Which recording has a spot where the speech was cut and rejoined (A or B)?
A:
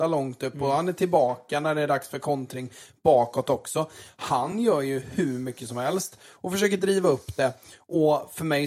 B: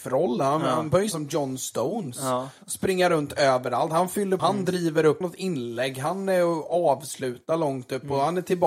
B